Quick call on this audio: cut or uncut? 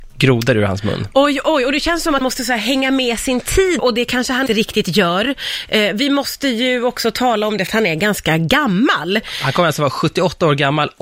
cut